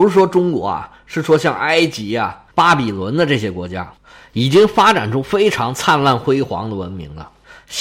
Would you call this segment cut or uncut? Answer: cut